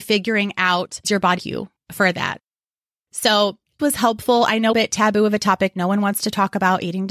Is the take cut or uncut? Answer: cut